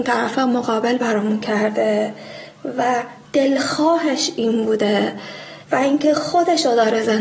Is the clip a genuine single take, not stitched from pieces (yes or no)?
no